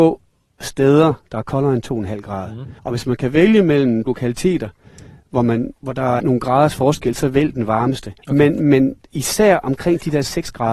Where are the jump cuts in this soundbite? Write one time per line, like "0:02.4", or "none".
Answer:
0:02.8
0:04.1
0:05.8
0:06.2
0:08.2